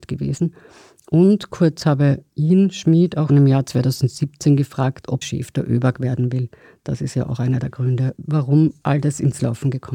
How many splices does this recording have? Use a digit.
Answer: 2